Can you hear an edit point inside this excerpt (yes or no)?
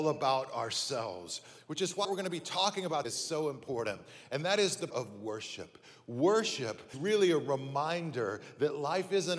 yes